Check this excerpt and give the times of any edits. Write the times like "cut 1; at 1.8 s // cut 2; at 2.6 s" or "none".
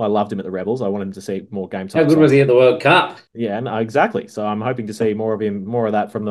cut 1; at 3.3 s